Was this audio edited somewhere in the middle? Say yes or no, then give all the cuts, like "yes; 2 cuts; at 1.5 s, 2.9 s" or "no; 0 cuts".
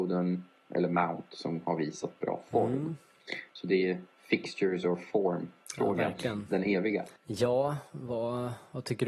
yes; 1 cut; at 7.2 s